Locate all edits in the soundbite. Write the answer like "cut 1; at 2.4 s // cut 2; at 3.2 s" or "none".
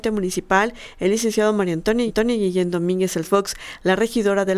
cut 1; at 2.1 s // cut 2; at 3.2 s